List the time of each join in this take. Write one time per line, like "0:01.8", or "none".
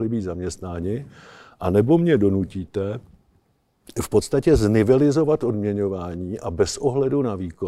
none